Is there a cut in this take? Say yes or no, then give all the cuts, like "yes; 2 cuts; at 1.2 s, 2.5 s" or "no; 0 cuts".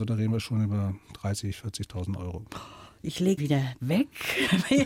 yes; 1 cut; at 3.4 s